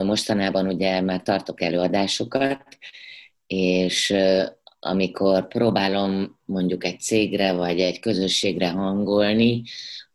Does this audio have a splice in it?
no; 0 cuts

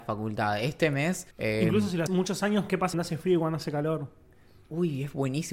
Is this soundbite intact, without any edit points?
no; 3 cuts; at 1.3 s, 2.1 s, 2.9 s

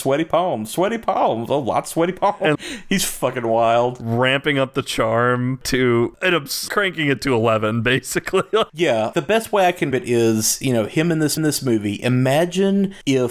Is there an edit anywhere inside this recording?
yes; 5 cuts; at 2.5 s, 6.7 s, 9.1 s, 9.9 s, 11.4 s

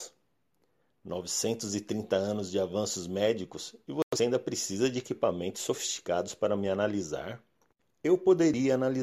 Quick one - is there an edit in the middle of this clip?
no; 0 cuts

